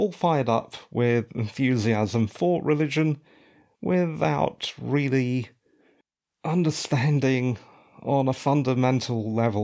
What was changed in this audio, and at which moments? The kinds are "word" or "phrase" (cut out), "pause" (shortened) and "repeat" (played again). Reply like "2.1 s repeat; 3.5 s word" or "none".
none